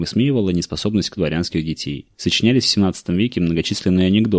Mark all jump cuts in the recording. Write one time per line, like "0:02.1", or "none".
0:01.2
0:02.1